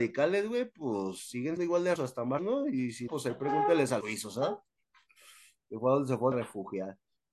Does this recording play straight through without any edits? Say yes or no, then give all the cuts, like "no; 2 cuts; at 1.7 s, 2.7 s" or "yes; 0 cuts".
no; 6 cuts; at 1.6 s, 2.0 s, 2.4 s, 3.1 s, 4.0 s, 6.3 s